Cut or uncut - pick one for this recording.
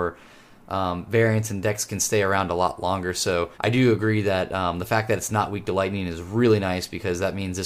cut